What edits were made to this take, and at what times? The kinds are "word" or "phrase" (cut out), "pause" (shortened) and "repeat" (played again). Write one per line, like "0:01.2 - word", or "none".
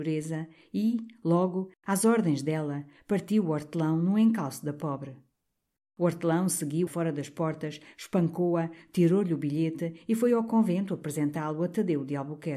0:06.9 - word